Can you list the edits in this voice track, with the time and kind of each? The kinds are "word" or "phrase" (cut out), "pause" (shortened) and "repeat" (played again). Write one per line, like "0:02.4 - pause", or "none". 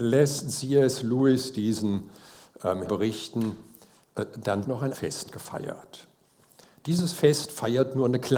0:02.9 - word
0:04.6 - phrase
0:04.9 - word